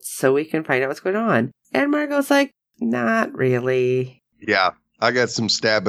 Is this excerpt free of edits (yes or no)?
yes